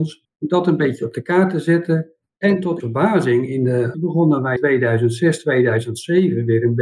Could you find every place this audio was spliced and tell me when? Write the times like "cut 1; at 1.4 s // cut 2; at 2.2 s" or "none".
cut 1; at 2.8 s // cut 2; at 3.9 s // cut 3; at 4.6 s

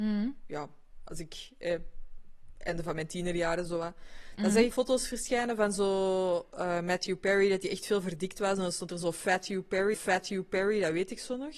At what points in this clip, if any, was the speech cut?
cut 1; at 4.7 s // cut 2; at 9.9 s

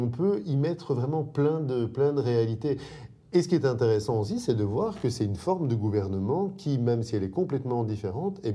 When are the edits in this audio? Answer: cut 1; at 3.2 s

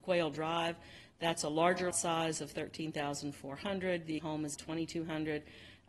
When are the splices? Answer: cut 1; at 1.9 s // cut 2; at 4.2 s // cut 3; at 4.5 s

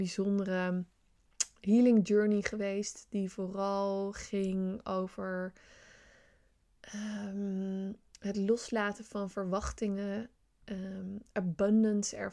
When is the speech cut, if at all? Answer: none

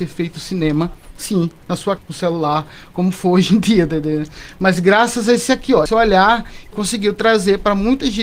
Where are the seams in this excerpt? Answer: cut 1; at 2.0 s // cut 2; at 5.9 s // cut 3; at 6.7 s

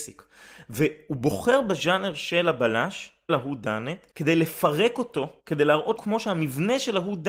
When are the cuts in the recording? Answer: cut 1; at 3.3 s // cut 2; at 4.1 s // cut 3; at 5.4 s // cut 4; at 6.0 s

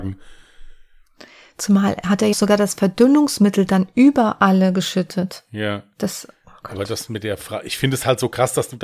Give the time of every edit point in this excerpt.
cut 1; at 2.3 s

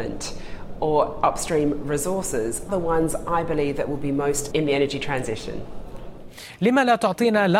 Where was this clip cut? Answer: cut 1; at 2.7 s // cut 2; at 4.5 s

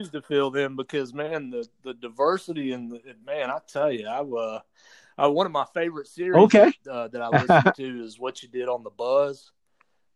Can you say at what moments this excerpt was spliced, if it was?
none

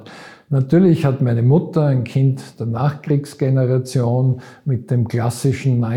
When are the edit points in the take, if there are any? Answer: none

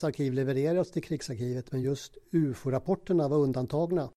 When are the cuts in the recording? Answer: none

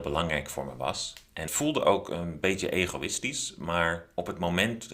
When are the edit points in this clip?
cut 1; at 1.5 s

